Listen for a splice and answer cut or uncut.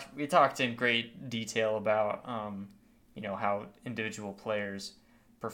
uncut